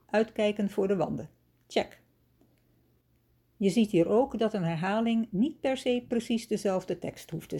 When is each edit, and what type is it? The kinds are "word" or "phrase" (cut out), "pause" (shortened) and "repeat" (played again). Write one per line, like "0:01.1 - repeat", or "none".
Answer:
none